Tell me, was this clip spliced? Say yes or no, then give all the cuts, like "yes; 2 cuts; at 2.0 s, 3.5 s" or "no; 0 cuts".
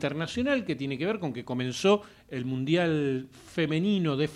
no; 0 cuts